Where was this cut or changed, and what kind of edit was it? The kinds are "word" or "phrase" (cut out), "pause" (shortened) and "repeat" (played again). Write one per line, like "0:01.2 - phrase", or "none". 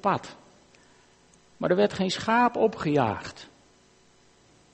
none